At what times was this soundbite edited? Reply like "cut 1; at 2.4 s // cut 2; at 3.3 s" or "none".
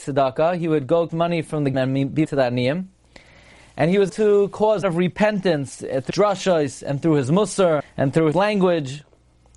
cut 1; at 1.1 s // cut 2; at 1.7 s // cut 3; at 2.2 s // cut 4; at 4.1 s // cut 5; at 4.8 s // cut 6; at 6.1 s // cut 7; at 7.8 s // cut 8; at 8.3 s